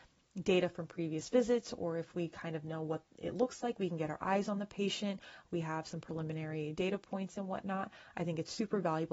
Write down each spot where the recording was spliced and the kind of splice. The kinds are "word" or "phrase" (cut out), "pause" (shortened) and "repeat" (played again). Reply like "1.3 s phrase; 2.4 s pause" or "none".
none